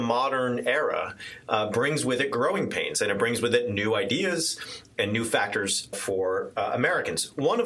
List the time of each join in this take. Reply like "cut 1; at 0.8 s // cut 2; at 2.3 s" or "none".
cut 1; at 5.9 s